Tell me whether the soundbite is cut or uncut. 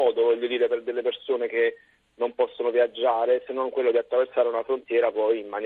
uncut